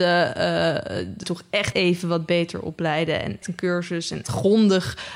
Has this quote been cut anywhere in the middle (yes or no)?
yes